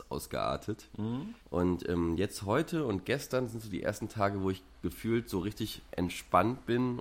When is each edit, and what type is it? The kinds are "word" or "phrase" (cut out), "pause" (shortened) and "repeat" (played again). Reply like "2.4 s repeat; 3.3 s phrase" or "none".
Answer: 1.4 s pause